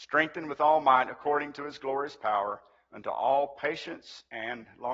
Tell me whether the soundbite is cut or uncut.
uncut